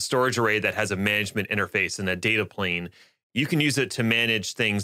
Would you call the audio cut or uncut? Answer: uncut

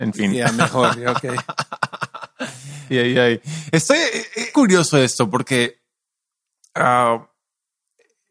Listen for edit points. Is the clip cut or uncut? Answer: cut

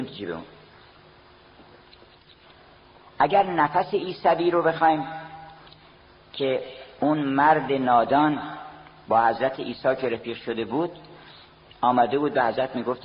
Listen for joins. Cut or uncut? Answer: uncut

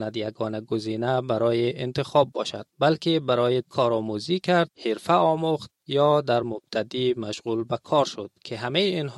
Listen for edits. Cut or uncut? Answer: cut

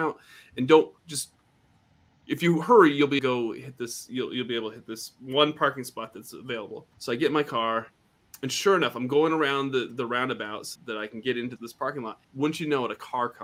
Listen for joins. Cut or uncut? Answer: cut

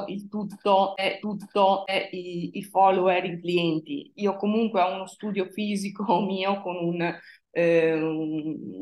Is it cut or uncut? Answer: cut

